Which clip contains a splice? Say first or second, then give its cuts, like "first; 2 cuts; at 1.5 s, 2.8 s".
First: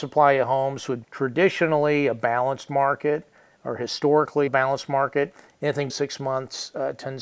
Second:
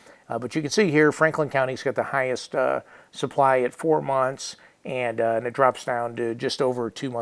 first; 3 cuts; at 1.0 s, 4.5 s, 5.9 s